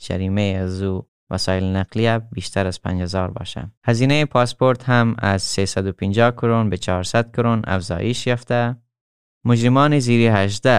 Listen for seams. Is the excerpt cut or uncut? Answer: cut